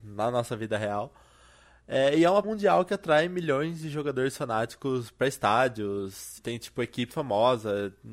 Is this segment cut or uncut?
cut